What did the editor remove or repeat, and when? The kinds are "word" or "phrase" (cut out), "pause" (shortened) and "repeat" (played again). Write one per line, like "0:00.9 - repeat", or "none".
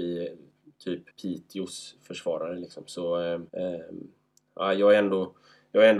0:01.1 - pause
0:03.5 - pause